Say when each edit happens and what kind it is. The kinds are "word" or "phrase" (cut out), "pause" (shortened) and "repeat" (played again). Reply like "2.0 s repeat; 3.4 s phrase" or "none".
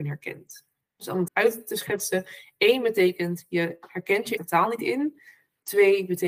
1.3 s word; 4.4 s word